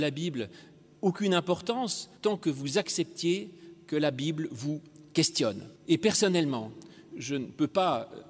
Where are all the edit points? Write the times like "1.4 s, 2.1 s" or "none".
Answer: 2.2 s, 5.8 s